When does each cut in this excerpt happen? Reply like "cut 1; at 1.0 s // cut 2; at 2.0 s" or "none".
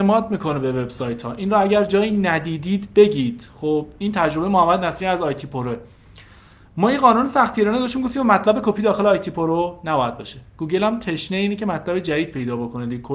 none